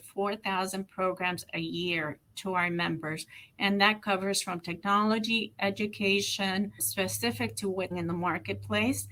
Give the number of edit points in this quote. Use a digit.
2